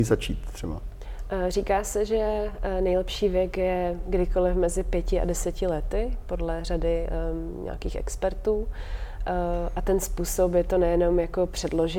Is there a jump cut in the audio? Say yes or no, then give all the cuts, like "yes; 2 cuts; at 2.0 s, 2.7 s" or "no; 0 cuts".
no; 0 cuts